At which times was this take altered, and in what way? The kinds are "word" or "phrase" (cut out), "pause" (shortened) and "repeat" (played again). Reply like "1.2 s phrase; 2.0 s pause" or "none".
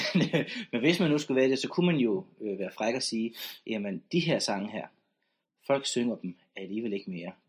none